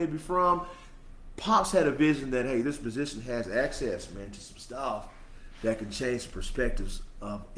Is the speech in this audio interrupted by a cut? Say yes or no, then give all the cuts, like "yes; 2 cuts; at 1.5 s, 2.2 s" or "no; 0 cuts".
no; 0 cuts